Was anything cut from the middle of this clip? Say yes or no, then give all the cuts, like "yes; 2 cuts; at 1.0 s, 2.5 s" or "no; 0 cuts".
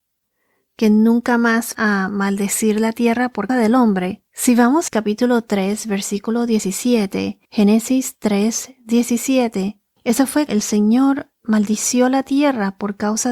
yes; 7 cuts; at 1.7 s, 3.5 s, 4.3 s, 4.9 s, 7.4 s, 10.0 s, 10.5 s